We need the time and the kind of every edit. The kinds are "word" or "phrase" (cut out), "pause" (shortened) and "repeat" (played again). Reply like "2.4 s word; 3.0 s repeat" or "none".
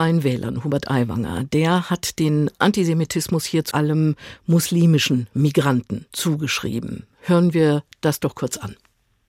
3.7 s phrase